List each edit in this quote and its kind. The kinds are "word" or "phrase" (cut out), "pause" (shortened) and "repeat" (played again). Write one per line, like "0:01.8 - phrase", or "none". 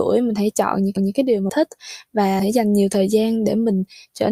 0:01.0 - repeat
0:01.5 - word
0:02.4 - word